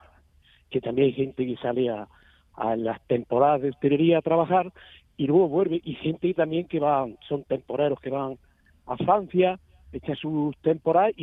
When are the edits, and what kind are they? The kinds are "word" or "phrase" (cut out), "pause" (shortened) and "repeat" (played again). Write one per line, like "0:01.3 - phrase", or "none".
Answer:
none